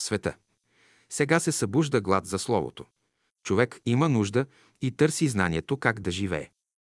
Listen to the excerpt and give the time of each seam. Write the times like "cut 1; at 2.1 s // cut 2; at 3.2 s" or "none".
none